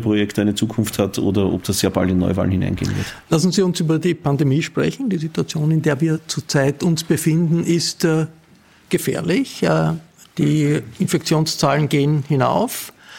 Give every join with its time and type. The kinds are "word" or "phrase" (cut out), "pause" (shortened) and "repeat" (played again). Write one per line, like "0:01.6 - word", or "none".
none